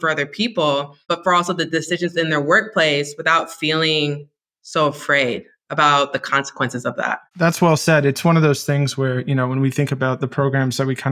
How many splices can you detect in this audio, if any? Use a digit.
2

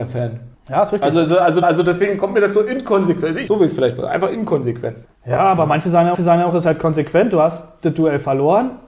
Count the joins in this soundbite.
4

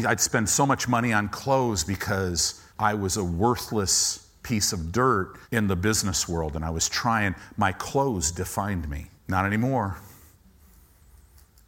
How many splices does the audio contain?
3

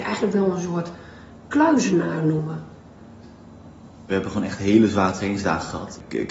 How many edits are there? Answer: 0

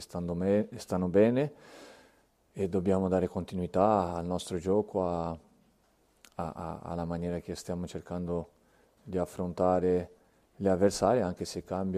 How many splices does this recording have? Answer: 0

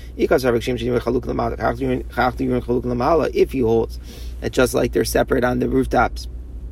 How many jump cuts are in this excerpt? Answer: 0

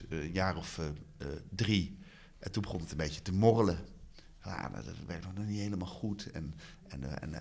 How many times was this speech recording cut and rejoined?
0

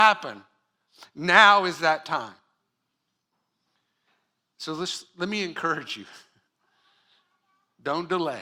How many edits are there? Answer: 0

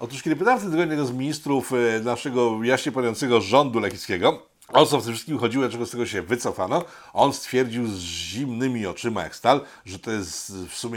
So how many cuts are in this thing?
1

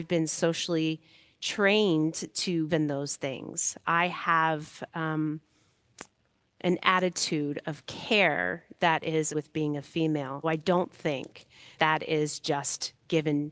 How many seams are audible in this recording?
4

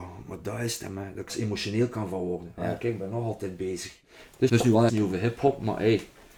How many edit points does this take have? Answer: 3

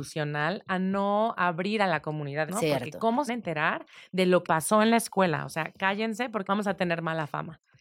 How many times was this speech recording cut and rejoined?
4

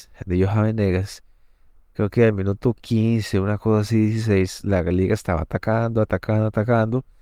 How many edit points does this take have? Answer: 0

